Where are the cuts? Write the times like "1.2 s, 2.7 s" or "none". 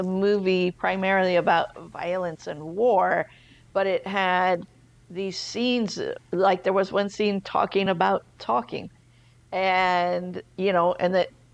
none